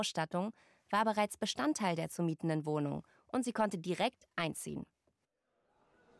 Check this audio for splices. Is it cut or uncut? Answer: uncut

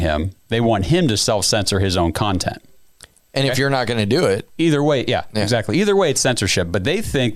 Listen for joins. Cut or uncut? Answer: uncut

